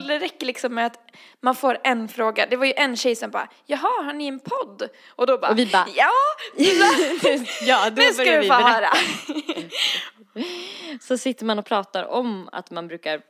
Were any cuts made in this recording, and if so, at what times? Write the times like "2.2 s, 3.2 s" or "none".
none